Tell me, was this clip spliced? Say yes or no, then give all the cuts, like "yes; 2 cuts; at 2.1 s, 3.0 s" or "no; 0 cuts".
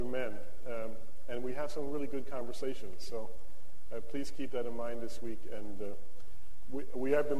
no; 0 cuts